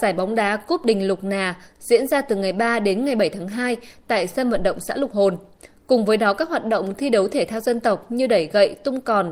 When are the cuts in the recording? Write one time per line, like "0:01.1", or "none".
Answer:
none